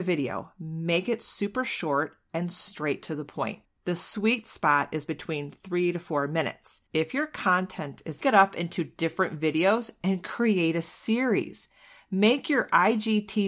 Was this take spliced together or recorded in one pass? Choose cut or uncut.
cut